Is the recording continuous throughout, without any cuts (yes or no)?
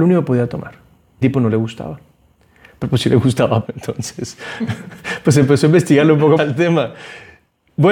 no